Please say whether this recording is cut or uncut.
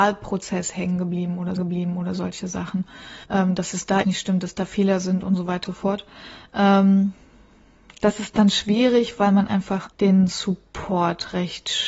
cut